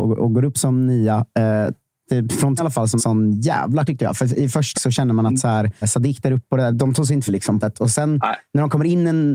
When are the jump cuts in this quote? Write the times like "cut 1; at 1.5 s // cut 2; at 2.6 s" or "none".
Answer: cut 1; at 2.1 s // cut 2; at 2.6 s // cut 3; at 3.0 s // cut 4; at 3.9 s // cut 5; at 4.7 s // cut 6; at 5.8 s // cut 7; at 6.7 s // cut 8; at 7.3 s // cut 9; at 7.6 s